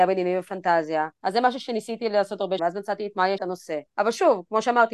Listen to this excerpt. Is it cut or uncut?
cut